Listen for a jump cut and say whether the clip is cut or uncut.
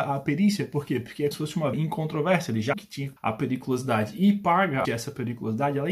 cut